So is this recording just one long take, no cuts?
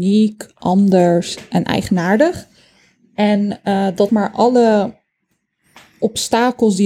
no; 1 cut; at 4.1 s

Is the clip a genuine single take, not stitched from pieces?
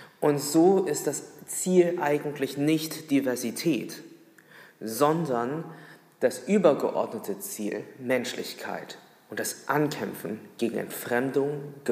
yes; 0 cuts

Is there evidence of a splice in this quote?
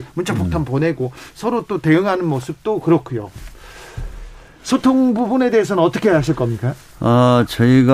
no; 0 cuts

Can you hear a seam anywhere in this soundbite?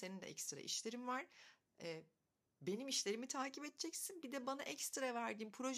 no; 0 cuts

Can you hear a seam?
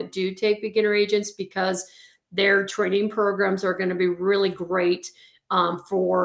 no; 0 cuts

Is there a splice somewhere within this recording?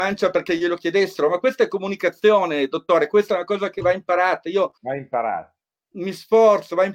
yes; 1 cut; at 4.8 s

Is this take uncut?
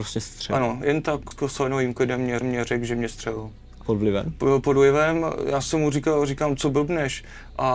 no; 3 cuts; at 1.3 s, 2.4 s, 3.8 s

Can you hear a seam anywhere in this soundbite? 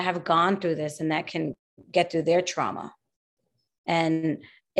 no; 0 cuts

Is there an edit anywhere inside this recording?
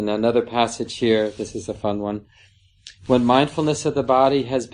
yes; 1 cut; at 3.0 s

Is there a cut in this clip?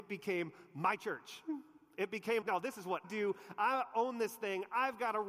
yes; 2 cuts; at 2.4 s, 3.0 s

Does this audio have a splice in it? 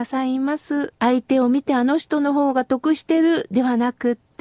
yes; 1 cut; at 1.0 s

